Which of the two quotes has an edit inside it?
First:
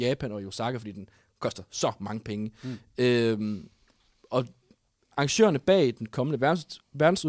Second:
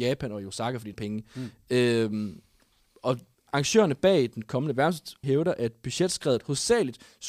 second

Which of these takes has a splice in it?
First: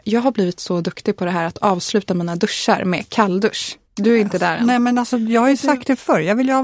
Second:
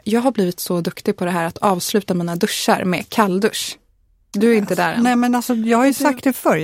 first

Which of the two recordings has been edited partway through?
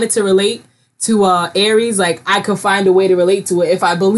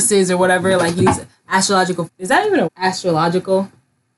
second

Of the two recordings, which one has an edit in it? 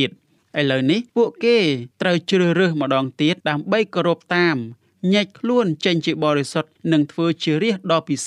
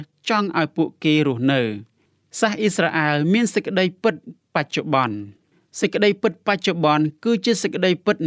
first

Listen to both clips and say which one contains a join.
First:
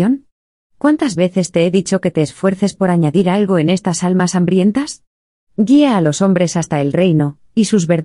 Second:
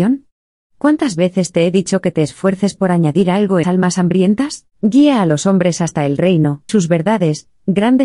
second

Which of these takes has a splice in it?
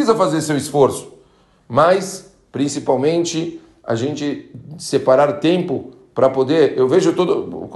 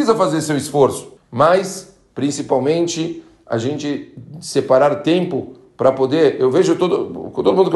second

